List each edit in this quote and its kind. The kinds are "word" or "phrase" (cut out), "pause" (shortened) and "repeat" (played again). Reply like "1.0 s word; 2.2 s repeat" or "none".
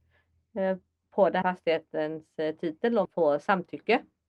1.4 s word; 3.0 s word